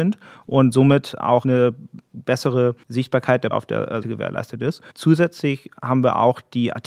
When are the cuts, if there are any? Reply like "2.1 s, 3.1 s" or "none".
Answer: 1.4 s, 2.8 s, 3.5 s, 4.0 s, 4.9 s